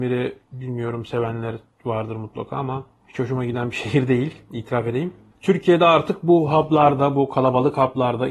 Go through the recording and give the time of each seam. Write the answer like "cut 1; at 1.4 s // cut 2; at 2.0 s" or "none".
none